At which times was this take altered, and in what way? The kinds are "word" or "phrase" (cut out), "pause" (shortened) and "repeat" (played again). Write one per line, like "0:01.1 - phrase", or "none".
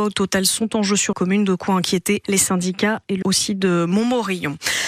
0:01.1 - word
0:02.2 - word
0:03.2 - word